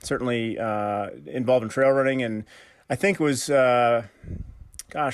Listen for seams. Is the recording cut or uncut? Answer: uncut